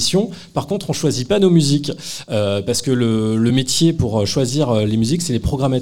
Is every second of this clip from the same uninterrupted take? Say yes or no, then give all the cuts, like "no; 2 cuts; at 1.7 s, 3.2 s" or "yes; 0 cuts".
yes; 0 cuts